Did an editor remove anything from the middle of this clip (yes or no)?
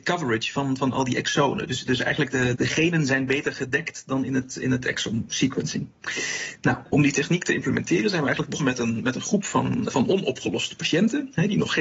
yes